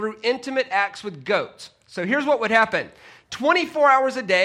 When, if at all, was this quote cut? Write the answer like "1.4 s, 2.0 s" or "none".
none